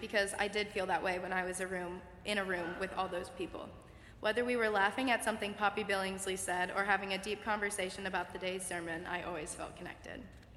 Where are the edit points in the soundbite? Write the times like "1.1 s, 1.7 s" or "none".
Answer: none